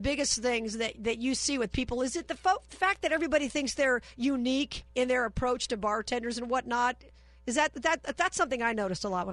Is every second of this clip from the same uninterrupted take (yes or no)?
yes